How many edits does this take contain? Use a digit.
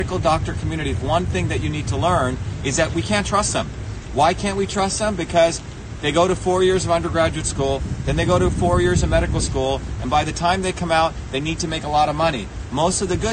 0